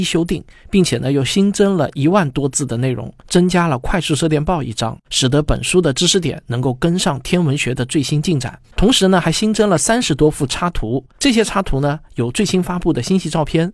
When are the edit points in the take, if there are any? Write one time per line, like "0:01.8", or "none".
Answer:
0:03.2
0:05.1
0:08.6
0:11.1